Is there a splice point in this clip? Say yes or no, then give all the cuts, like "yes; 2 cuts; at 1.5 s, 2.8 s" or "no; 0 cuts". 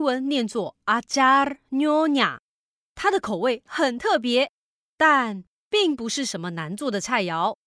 no; 0 cuts